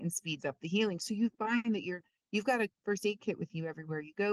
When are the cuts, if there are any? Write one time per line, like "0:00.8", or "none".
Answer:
none